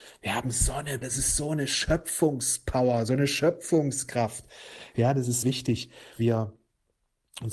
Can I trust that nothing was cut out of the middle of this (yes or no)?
no